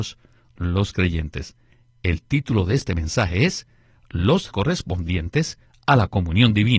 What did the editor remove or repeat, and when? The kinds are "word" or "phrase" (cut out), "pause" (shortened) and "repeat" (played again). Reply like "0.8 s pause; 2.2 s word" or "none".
4.5 s word

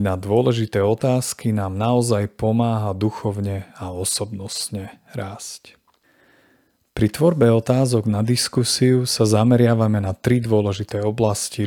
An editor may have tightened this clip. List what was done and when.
6.0 s pause

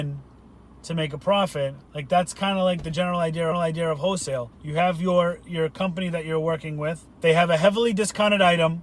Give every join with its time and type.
1.9 s pause; 3.5 s repeat; 4.5 s pause; 7.1 s pause

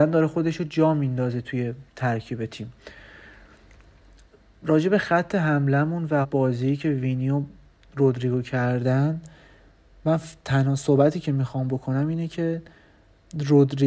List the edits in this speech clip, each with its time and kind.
6.2 s word

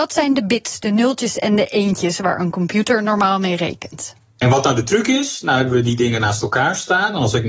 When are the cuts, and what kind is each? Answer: none

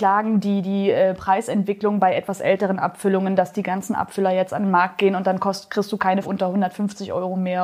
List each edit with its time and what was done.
6.2 s word

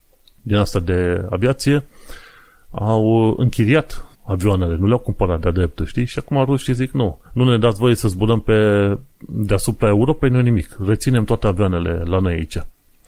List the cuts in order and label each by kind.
4.1 s pause; 7.2 s pause

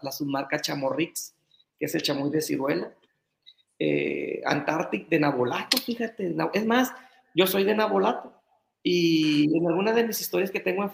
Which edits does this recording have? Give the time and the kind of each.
none

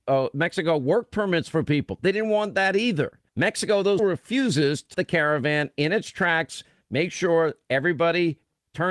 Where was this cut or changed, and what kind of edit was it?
4.0 s word; 4.9 s word

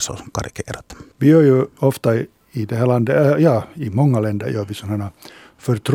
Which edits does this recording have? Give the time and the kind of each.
1.1 s pause

